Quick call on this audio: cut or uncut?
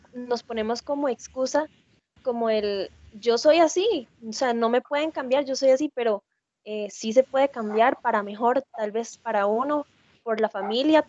uncut